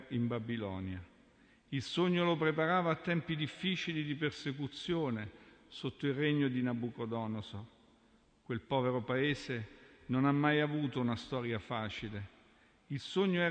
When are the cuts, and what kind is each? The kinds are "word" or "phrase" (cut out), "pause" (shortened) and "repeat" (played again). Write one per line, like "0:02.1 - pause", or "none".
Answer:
none